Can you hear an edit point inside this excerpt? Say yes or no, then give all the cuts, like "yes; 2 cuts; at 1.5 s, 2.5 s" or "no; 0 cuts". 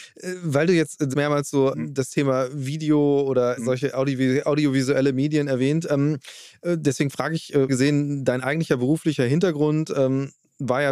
yes; 4 cuts; at 1.1 s, 1.7 s, 3.6 s, 7.7 s